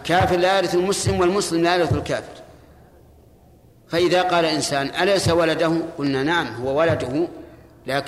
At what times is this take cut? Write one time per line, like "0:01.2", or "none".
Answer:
none